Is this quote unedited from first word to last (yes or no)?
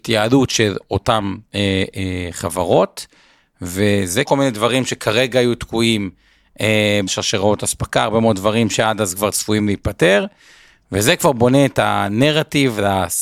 no